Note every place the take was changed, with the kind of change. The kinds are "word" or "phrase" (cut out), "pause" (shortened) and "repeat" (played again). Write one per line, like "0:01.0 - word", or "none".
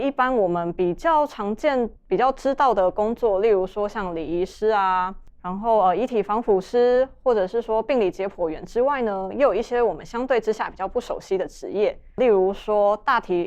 0:02.0 - pause